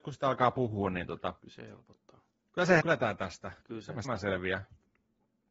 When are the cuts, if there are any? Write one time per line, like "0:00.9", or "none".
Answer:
0:01.4
0:02.3
0:02.8
0:03.6
0:04.0

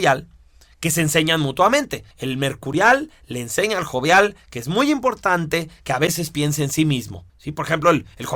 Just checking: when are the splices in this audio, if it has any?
0:02.1
0:07.3

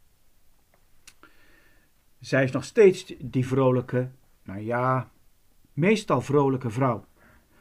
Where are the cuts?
none

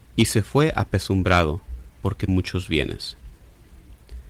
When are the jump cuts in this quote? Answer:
0:02.3

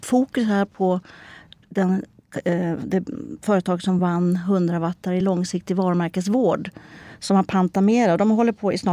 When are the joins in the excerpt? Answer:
none

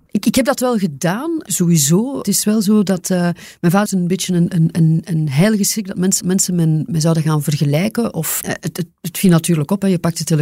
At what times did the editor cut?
0:03.9
0:06.2
0:08.4

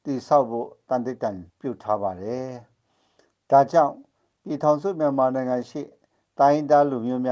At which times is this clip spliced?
0:01.5

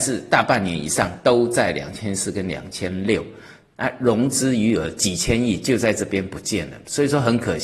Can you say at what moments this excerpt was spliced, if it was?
none

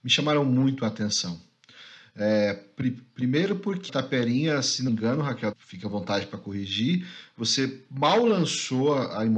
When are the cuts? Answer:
0:03.9
0:04.9
0:05.5

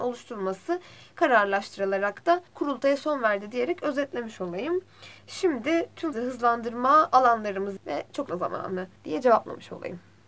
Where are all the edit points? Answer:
0:02.5
0:05.2
0:06.1
0:07.8
0:08.3
0:09.0

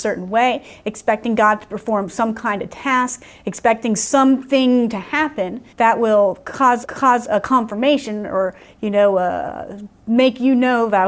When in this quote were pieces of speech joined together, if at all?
0:05.7
0:06.8

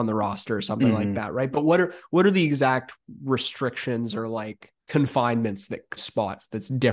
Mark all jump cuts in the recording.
0:04.8
0:06.0

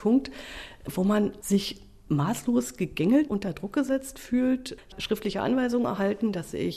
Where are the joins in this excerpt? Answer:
0:01.4
0:03.3
0:04.9

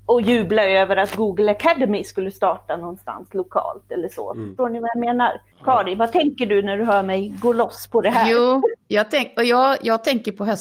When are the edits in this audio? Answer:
0:05.5

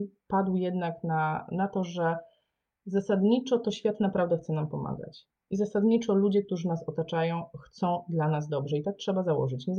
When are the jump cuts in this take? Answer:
none

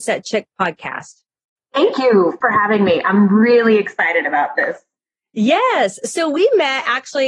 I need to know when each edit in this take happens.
none

